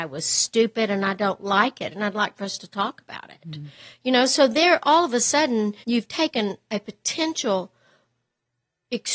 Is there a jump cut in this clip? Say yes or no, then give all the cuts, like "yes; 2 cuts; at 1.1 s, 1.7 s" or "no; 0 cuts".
yes; 1 cut; at 5.8 s